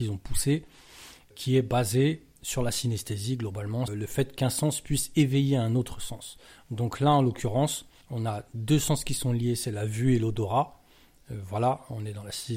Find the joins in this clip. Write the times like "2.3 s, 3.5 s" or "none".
1.3 s, 3.9 s, 8.0 s